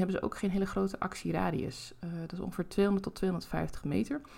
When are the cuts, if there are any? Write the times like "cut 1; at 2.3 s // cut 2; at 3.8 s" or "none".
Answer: none